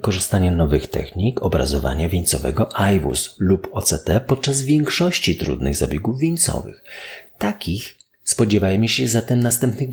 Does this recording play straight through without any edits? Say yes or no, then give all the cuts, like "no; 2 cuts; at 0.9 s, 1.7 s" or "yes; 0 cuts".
yes; 0 cuts